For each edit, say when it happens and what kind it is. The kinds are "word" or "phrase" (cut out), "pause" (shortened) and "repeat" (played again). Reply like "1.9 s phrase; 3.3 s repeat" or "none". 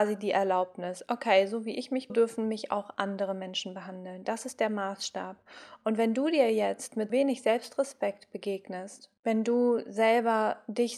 2.1 s phrase; 7.1 s word; 9.2 s pause